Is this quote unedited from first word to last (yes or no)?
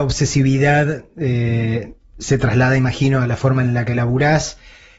yes